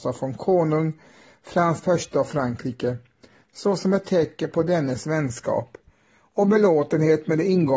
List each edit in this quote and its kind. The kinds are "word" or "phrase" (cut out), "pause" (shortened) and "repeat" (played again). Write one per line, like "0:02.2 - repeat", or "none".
0:01.8 - word